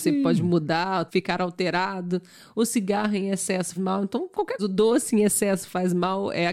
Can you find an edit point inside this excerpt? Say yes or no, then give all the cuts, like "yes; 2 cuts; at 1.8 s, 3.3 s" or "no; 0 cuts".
yes; 3 cuts; at 1.1 s, 3.8 s, 4.6 s